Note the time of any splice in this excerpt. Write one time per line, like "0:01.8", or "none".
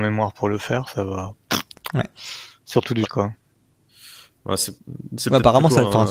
0:03.0
0:04.8

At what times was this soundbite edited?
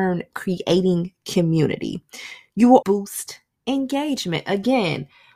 0:02.8

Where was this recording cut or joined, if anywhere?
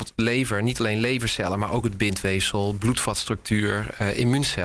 none

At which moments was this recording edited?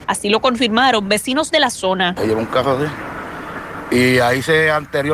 none

